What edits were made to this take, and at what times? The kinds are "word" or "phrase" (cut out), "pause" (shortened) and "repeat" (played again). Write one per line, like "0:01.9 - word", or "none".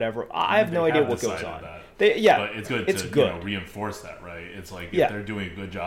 0:02.6 - word